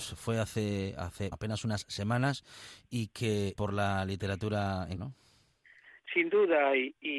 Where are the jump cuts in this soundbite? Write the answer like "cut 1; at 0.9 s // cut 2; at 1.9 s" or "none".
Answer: cut 1; at 1.3 s // cut 2; at 3.6 s // cut 3; at 5.0 s